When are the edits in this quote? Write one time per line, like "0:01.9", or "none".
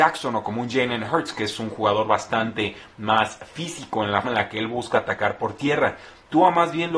0:04.2